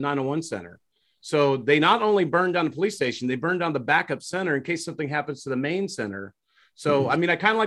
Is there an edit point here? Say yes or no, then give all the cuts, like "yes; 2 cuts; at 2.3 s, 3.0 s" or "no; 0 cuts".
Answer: no; 0 cuts